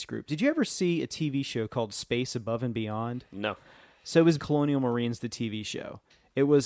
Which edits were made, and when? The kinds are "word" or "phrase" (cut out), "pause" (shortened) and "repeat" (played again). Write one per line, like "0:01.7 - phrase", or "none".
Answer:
0:04.4 - word

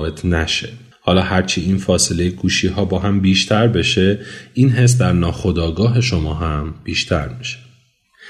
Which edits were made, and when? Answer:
0:00.9 - pause

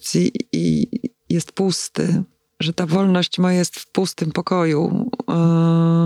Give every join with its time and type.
none

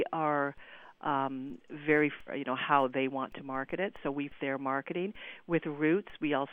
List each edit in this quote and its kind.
0:02.3 - phrase
0:04.4 - word

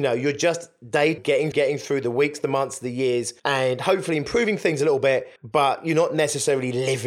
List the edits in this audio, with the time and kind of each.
0:01.2 - word
0:01.5 - word
0:03.4 - pause
0:05.4 - pause

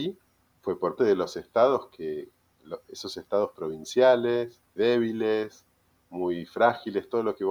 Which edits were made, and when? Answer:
0:01.0 - word
0:04.8 - word

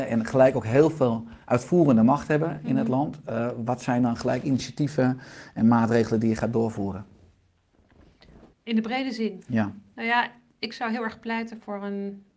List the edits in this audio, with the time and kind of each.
0:01.4 - pause
0:08.5 - pause

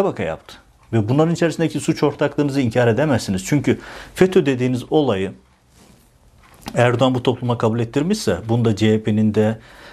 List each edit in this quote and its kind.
none

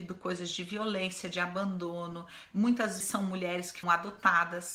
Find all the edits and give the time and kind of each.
0:03.0 - word
0:03.8 - word

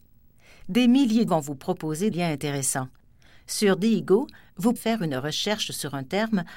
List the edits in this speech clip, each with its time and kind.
0:01.3 - word
0:02.1 - word
0:04.8 - word

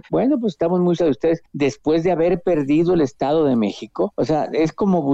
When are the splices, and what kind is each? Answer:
0:01.0 - word

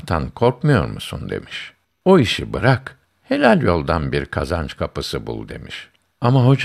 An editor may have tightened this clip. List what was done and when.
none

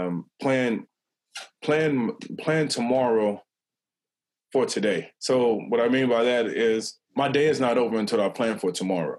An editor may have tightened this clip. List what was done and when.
0:05.2 - pause
0:07.0 - pause

